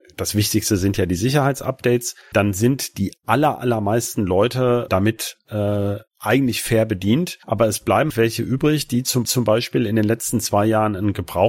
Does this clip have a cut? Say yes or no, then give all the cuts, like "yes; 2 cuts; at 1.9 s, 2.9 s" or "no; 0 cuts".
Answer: yes; 5 cuts; at 2.3 s, 4.9 s, 7.4 s, 8.1 s, 9.2 s